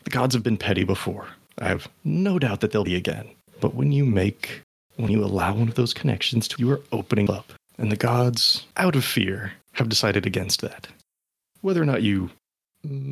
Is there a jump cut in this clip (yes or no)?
yes